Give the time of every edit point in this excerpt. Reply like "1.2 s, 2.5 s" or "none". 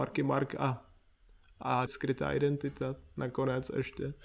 1.9 s